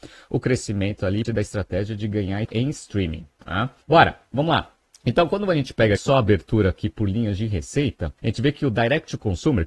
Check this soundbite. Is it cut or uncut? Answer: cut